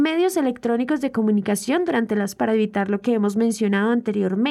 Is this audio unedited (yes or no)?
no